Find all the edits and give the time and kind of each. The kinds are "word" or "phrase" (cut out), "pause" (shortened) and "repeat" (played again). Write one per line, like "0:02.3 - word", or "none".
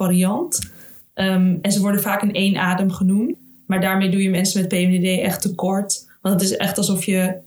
none